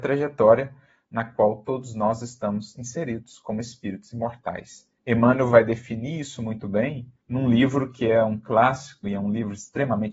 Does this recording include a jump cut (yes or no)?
yes